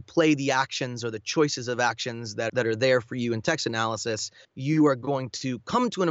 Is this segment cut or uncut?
cut